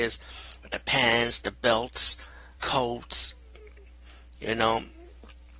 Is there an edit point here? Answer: yes; 1 cut; at 2.6 s

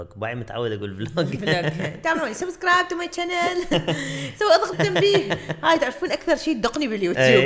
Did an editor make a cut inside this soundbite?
yes; 1 cut; at 4.7 s

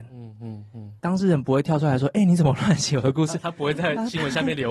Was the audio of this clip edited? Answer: yes; 1 cut; at 1.0 s

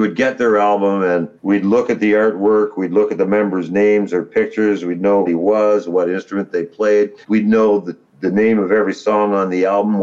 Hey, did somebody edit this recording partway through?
yes; 3 cuts; at 1.4 s, 5.3 s, 7.2 s

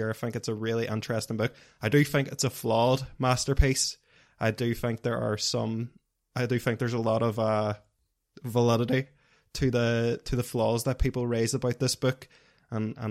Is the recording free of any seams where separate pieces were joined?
yes; 0 cuts

